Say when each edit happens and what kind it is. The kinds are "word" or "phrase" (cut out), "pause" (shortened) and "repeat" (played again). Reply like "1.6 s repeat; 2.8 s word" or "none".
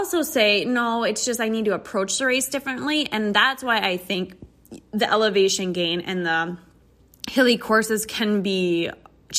none